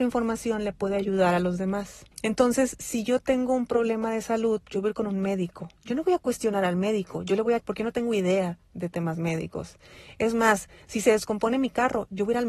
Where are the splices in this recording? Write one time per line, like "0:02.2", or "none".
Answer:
0:02.1
0:05.8
0:07.6